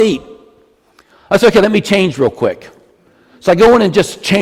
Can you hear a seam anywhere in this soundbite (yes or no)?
no